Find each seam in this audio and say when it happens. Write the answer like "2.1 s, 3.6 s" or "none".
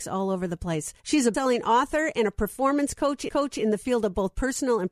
1.0 s, 1.3 s, 3.3 s